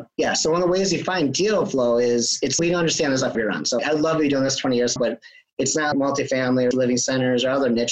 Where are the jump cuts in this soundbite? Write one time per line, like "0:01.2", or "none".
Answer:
0:02.6
0:03.3
0:03.8
0:05.0
0:05.9
0:06.7